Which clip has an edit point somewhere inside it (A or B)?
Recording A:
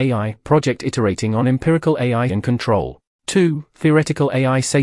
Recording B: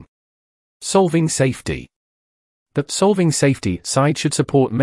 A